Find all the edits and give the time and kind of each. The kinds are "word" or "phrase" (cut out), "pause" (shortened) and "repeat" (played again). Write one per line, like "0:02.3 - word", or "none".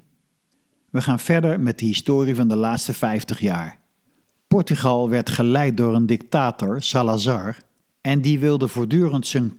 none